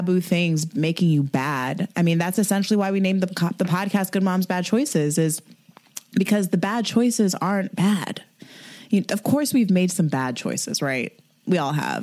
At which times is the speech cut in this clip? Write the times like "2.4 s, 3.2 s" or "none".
none